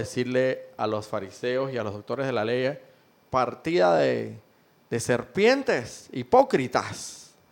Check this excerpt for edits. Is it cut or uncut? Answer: uncut